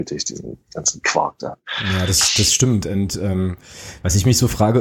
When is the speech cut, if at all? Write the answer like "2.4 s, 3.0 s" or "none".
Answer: none